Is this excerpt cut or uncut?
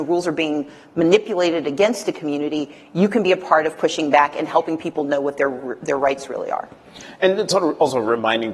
uncut